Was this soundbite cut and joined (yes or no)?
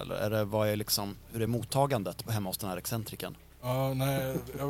no